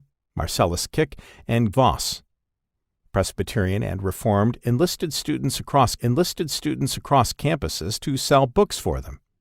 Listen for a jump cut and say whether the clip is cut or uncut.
cut